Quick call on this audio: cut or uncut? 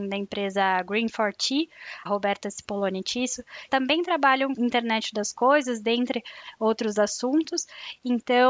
cut